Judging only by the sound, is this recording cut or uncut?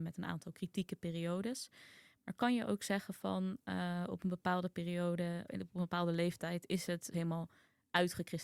cut